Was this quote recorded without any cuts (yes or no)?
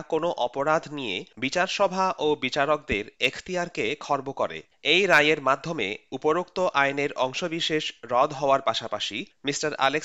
no